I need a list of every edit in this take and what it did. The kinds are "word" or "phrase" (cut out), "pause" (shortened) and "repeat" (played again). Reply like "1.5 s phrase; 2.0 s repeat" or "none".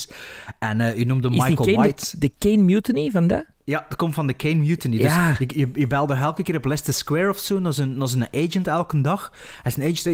none